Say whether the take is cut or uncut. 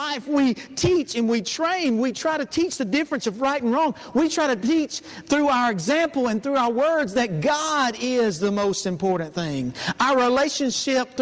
uncut